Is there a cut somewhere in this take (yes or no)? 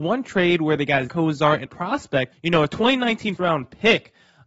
yes